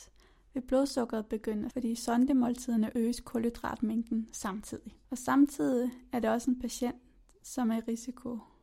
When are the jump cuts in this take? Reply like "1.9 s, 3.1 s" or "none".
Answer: 1.7 s, 2.9 s, 5.0 s

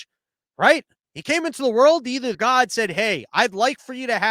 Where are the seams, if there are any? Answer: 2.3 s

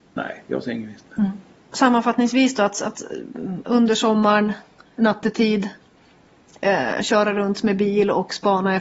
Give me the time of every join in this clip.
none

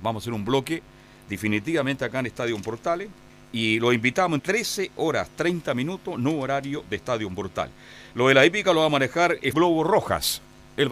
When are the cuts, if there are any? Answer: 3.3 s, 4.4 s, 9.5 s

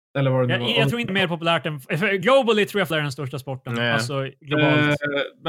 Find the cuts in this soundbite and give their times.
1.1 s, 2.9 s

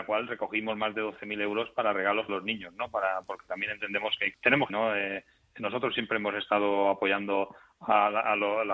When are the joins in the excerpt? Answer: 2.3 s, 4.3 s, 4.7 s

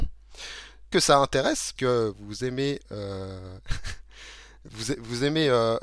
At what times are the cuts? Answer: 0.9 s, 1.8 s

